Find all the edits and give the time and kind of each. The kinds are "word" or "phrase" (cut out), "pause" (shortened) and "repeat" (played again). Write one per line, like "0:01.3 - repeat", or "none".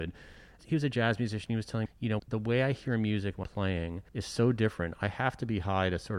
0:01.9 - word
0:02.2 - phrase
0:03.4 - word
0:04.1 - pause